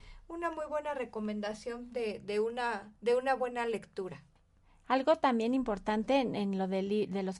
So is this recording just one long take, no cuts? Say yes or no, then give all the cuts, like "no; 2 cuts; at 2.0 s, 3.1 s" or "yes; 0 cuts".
no; 1 cut; at 3.0 s